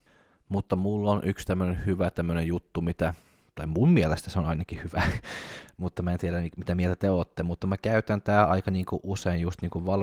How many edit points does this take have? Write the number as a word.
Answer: zero